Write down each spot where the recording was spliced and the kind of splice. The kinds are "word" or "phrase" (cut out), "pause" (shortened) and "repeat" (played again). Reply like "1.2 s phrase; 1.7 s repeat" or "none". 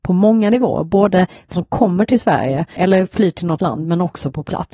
1.5 s word; 2.8 s word; 3.6 s word